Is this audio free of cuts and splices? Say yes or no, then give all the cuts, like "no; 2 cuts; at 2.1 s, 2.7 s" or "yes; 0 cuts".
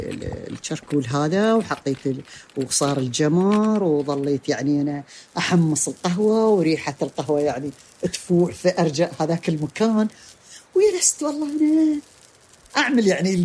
yes; 0 cuts